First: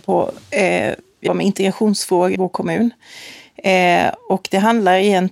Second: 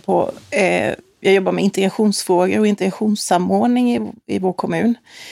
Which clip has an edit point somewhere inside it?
first; 2 cuts; at 1.3 s, 2.3 s

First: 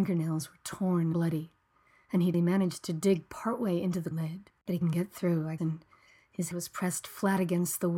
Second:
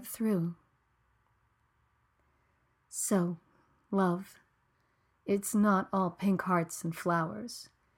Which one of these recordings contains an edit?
first; 6 cuts; at 1.1 s, 2.3 s, 4.1 s, 4.8 s, 5.6 s, 6.5 s

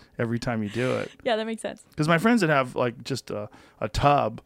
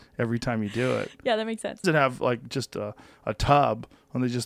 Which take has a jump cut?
second; 1 cut; at 1.8 s

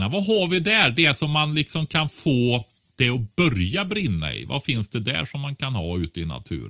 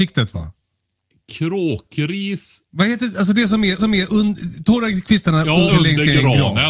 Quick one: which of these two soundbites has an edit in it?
second; 3 cuts; at 2.6 s, 3.8 s, 5.7 s

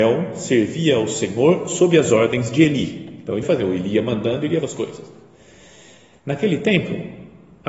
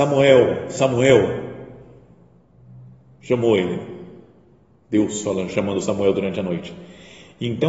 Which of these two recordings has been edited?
first; 2 cuts; at 3.4 s, 4.6 s

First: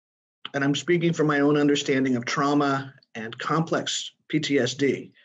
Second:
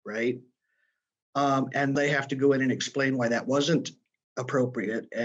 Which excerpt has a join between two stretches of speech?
second; 1 cut; at 2.0 s

